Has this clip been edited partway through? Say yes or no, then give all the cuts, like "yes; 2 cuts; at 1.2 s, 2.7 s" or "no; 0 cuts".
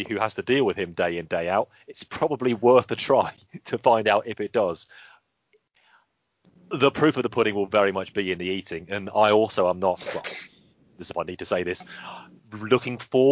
no; 0 cuts